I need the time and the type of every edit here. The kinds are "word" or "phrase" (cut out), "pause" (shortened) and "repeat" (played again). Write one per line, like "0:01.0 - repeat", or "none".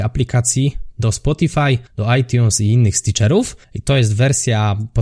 0:00.9 - word
0:01.9 - pause
0:03.6 - pause